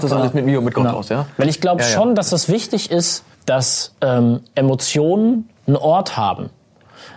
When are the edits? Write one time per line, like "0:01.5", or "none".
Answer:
0:03.3
0:05.6